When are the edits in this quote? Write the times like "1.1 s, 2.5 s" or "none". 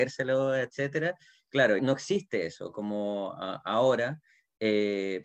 1.8 s